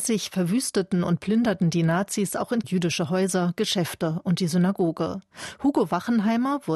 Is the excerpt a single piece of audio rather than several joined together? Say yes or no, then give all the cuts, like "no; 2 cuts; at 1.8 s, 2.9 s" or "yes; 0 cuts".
no; 1 cut; at 2.6 s